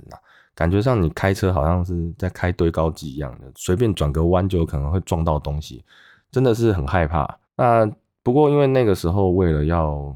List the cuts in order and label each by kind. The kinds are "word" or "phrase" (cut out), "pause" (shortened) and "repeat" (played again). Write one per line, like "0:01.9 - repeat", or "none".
0:07.4 - pause